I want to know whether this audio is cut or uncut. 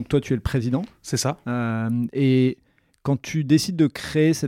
uncut